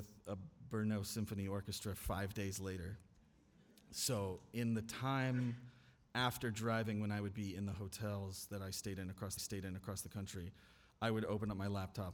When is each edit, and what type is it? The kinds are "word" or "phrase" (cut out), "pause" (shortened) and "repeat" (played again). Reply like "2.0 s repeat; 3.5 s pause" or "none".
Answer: 9.4 s repeat